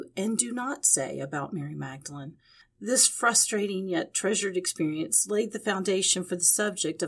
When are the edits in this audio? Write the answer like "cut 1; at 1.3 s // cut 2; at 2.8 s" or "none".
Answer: none